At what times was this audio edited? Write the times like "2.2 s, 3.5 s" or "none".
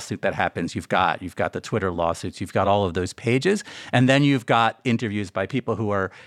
none

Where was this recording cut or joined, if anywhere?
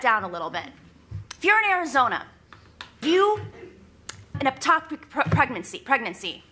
1.3 s, 3.0 s, 4.3 s

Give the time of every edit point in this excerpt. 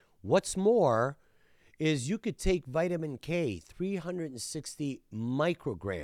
none

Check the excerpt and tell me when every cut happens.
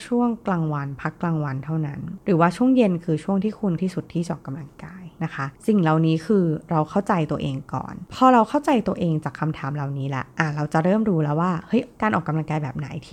3.8 s

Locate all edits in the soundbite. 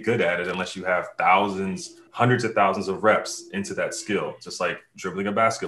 2.1 s

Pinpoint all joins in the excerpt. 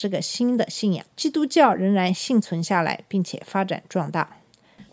1.1 s

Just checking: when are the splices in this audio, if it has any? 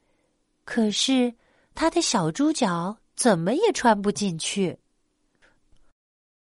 none

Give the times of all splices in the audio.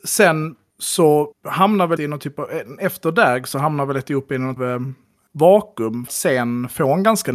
1.3 s, 2.0 s, 4.6 s, 6.1 s

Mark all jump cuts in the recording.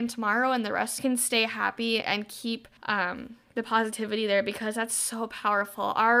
1.0 s, 2.0 s, 2.8 s

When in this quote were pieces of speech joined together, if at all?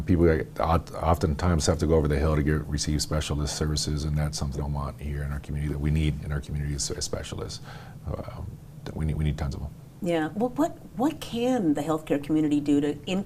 4.6 s

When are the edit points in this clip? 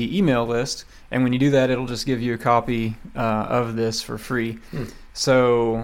none

